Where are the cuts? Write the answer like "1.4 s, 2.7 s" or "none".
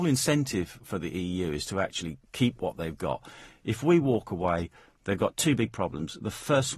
none